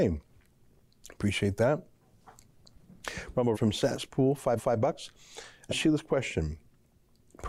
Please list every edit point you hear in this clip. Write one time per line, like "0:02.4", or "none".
0:03.5
0:04.6
0:05.7